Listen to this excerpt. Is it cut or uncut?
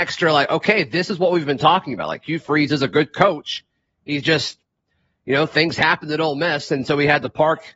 uncut